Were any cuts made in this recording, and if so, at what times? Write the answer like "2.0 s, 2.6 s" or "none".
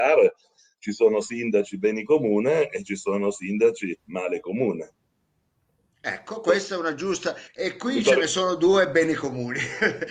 4.0 s, 7.5 s